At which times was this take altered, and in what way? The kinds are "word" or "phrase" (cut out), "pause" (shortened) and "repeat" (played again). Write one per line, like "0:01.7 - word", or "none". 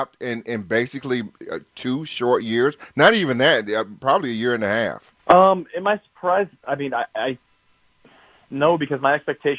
0:05.2 - pause

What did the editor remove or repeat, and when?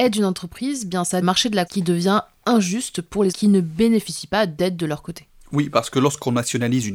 0:01.2 - phrase
0:01.7 - word
0:03.3 - word

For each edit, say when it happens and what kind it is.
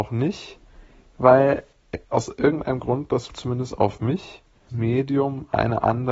0:02.0 - pause
0:03.3 - word
0:04.7 - word

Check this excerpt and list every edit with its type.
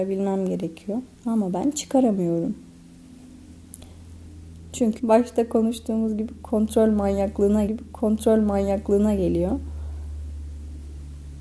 0:01.1 - pause
0:05.0 - word
0:07.7 - repeat

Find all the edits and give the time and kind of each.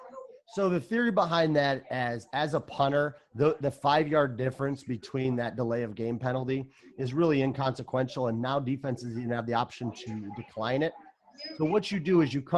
none

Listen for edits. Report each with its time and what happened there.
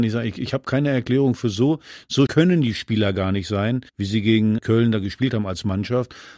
0:02.3 - word
0:03.9 - pause
0:04.6 - word

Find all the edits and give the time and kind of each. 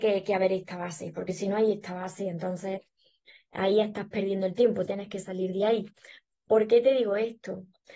none

